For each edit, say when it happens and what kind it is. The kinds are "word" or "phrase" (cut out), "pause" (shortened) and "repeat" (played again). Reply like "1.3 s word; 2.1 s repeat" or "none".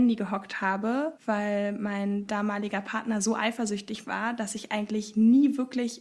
1.2 s pause